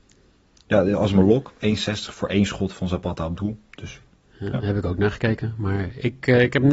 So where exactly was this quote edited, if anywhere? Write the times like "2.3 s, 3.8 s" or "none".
4.1 s